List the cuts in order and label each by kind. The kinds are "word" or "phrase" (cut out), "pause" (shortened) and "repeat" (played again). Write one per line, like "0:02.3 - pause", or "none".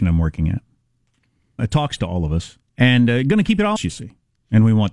0:01.6 - word
0:02.7 - pause
0:03.8 - word